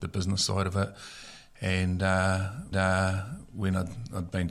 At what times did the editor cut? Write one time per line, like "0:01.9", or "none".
0:02.7